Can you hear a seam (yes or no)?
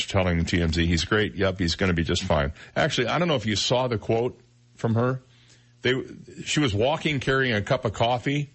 no